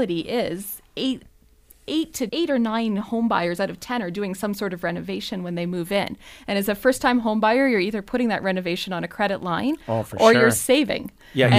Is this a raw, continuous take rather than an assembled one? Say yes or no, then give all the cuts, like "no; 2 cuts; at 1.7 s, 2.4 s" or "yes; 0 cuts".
no; 1 cut; at 2.3 s